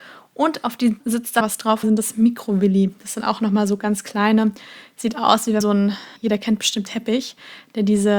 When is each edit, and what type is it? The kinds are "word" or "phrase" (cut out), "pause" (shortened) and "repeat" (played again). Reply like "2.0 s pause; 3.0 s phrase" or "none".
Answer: 1.0 s word; 1.4 s phrase; 1.8 s phrase; 5.6 s word; 6.2 s pause; 6.9 s word